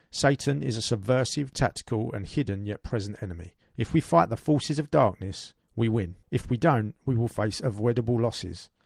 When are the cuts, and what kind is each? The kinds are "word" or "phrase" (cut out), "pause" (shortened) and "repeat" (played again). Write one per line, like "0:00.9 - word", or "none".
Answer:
0:03.6 - pause
0:06.2 - pause